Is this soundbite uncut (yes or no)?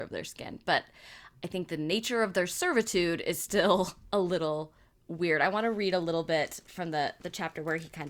yes